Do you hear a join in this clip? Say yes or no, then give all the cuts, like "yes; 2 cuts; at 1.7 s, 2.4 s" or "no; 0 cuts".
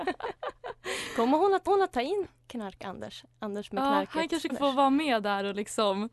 yes; 2 cuts; at 1.7 s, 4.5 s